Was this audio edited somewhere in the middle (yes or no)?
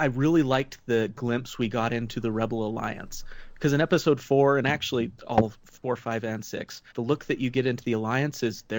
yes